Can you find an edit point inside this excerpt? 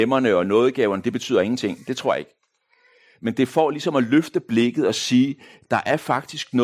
no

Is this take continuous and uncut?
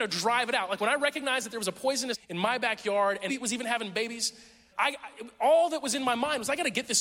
no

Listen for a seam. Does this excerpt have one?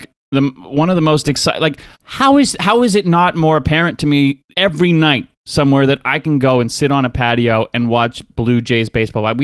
yes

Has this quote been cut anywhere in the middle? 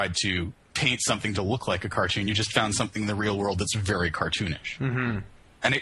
no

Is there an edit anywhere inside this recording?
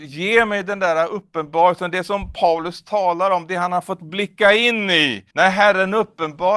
yes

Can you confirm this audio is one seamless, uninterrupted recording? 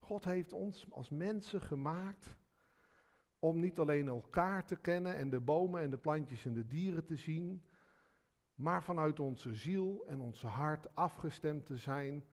yes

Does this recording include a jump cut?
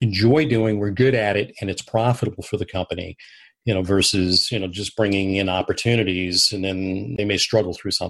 no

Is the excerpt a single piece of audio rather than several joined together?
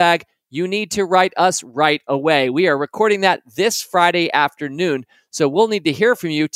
yes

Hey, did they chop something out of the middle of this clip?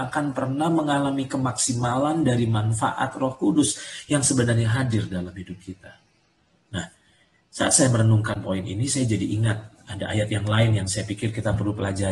no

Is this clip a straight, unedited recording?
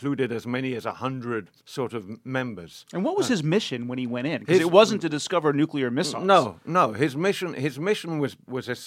no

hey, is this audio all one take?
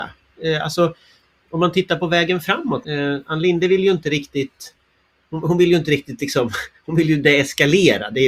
no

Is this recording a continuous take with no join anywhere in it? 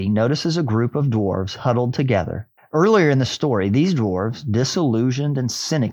no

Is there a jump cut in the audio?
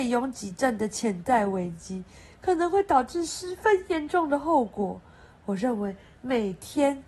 no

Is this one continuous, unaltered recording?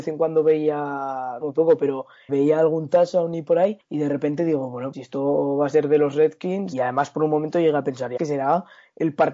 no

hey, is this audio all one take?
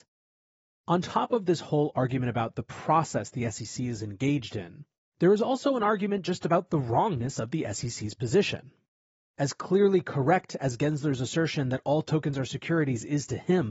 yes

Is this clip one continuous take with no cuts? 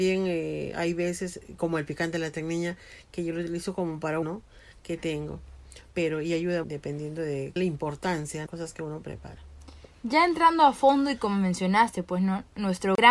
no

